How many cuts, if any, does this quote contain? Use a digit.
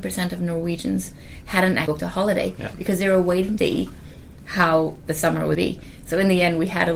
3